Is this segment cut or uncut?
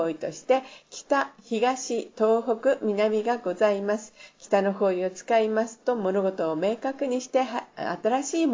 uncut